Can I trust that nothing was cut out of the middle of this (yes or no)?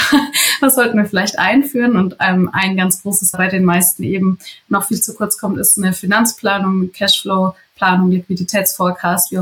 no